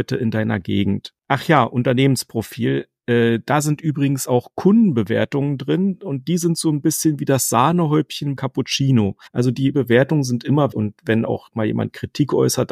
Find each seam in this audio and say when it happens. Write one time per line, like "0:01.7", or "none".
0:01.2
0:08.4
0:09.3
0:09.7
0:10.7